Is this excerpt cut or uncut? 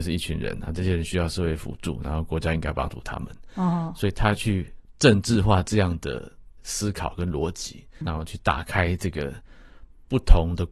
cut